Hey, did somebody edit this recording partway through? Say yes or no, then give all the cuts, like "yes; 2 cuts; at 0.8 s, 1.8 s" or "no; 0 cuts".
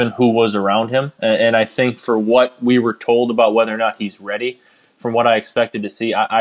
no; 0 cuts